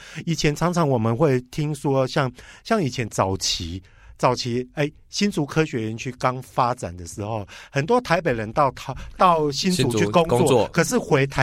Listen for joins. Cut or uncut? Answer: uncut